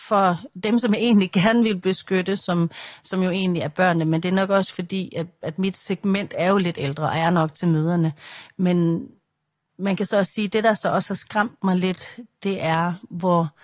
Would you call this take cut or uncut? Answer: uncut